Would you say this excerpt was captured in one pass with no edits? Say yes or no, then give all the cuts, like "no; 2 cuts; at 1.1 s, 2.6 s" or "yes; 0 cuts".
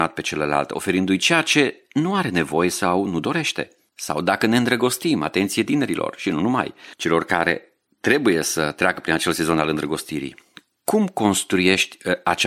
yes; 0 cuts